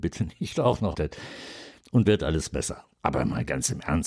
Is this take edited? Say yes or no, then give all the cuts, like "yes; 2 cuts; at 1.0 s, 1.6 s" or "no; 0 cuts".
yes; 3 cuts; at 0.9 s, 2.0 s, 2.9 s